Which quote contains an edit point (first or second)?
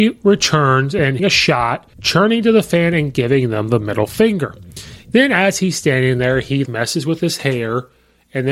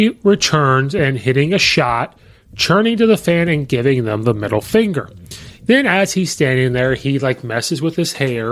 first